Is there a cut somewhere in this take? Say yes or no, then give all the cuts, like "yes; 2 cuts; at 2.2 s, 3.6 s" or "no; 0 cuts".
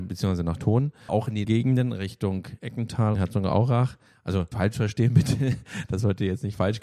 yes; 4 cuts; at 1.1 s, 1.4 s, 3.1 s, 4.5 s